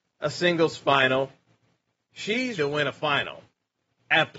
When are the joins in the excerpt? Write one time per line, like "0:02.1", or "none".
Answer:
0:02.6